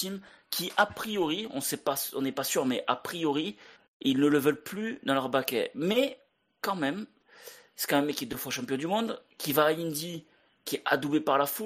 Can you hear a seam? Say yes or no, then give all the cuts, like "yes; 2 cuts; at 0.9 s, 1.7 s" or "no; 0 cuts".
no; 0 cuts